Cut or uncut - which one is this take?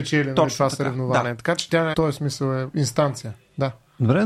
cut